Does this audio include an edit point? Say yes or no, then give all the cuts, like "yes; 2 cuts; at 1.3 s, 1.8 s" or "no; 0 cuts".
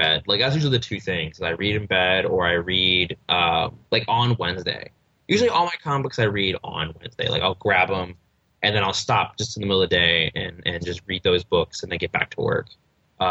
yes; 1 cut; at 3.8 s